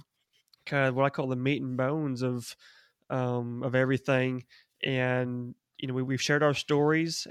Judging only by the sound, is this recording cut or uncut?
uncut